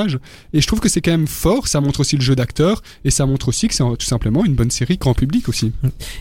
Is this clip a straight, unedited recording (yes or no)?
yes